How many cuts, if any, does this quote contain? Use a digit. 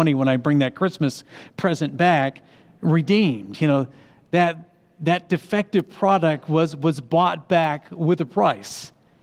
0